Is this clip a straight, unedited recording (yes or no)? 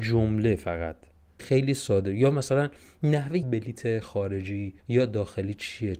no